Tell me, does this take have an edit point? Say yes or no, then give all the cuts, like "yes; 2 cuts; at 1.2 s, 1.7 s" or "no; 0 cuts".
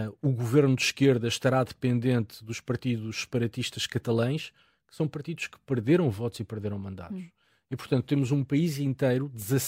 no; 0 cuts